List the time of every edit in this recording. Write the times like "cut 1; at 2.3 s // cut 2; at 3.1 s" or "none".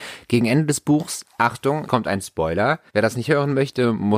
cut 1; at 1.9 s // cut 2; at 2.9 s